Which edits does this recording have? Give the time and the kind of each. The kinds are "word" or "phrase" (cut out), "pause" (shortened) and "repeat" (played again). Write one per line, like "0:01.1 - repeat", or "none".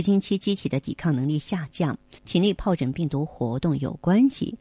0:02.2 - pause